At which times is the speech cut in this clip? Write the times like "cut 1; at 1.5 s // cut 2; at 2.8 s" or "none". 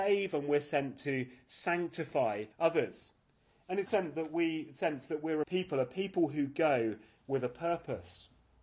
cut 1; at 2.5 s // cut 2; at 3.8 s // cut 3; at 5.4 s

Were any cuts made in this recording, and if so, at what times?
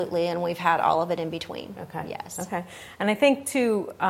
none

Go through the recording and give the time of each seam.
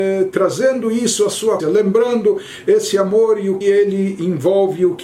cut 1; at 1.6 s // cut 2; at 3.6 s

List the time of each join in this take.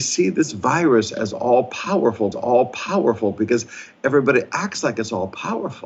cut 1; at 2.3 s

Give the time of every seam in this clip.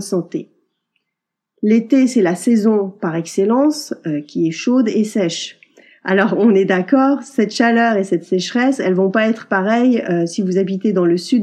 none

